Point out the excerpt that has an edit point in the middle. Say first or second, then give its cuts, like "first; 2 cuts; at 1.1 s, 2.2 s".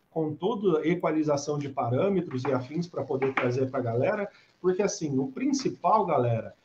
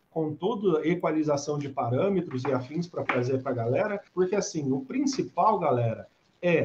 second; 2 cuts; at 3.1 s, 4.1 s